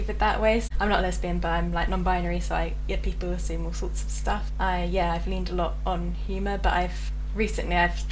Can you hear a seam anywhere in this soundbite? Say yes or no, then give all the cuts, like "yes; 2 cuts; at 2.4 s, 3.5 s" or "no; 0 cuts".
no; 0 cuts